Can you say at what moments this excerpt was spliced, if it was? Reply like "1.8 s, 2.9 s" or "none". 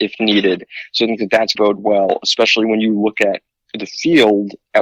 1.6 s